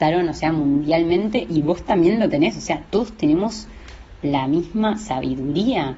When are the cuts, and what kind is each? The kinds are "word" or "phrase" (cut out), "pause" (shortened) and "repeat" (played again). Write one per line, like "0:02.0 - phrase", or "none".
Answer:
none